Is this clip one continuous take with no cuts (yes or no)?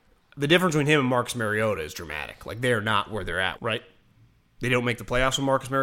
no